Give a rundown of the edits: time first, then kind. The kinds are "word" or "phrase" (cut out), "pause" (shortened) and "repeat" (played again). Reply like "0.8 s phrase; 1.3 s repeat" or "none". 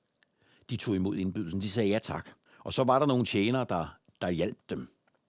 2.5 s pause